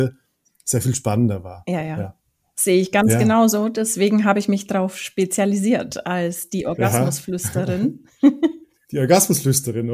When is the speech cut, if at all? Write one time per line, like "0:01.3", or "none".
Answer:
none

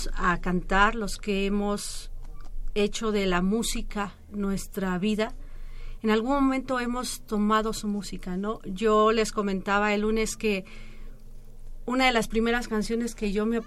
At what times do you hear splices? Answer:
none

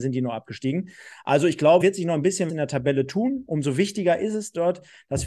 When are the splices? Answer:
0:01.8
0:02.5

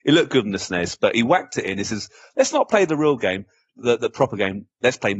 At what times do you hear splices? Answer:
none

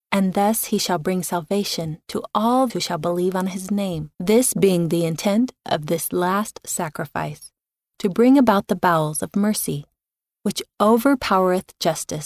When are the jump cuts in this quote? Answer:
0:02.7
0:04.1

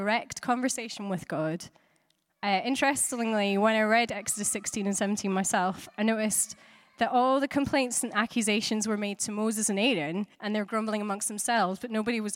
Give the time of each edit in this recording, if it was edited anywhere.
0:10.3

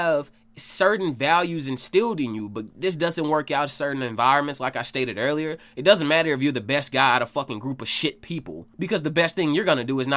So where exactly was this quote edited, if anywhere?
0:08.7

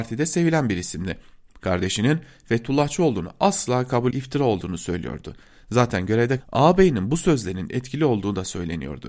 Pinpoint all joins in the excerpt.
0:04.1
0:06.4

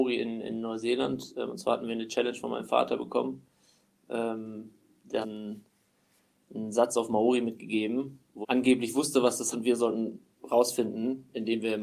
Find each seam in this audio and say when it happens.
0:05.2
0:08.4
0:09.5

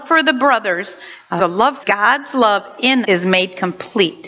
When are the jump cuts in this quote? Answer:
0:01.4
0:01.8
0:03.0

